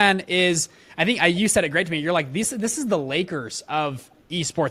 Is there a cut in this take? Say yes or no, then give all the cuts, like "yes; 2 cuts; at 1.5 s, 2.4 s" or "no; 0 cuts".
no; 0 cuts